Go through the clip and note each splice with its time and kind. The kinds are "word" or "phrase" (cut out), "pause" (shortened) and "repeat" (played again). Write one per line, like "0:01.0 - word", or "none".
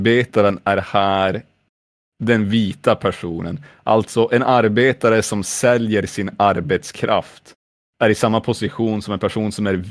none